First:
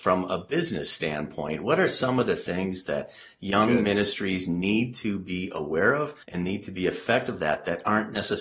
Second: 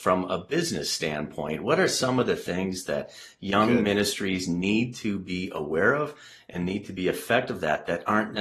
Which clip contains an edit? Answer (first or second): first